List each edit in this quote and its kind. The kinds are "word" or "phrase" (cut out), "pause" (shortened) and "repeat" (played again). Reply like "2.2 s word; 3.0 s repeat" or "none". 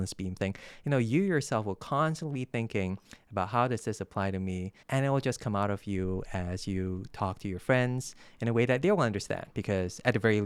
4.8 s pause; 9.5 s pause